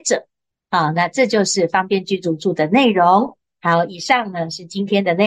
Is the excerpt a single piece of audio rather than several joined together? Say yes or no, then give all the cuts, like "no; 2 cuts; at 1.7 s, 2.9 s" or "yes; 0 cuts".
yes; 0 cuts